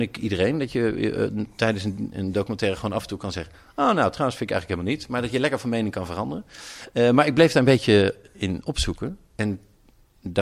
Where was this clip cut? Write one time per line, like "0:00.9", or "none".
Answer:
none